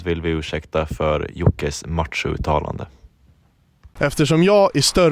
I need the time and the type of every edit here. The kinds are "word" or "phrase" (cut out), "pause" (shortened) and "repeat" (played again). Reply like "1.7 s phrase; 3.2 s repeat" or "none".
none